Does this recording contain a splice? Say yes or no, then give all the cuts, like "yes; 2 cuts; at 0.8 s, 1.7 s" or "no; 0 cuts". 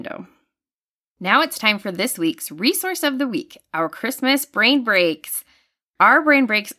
no; 0 cuts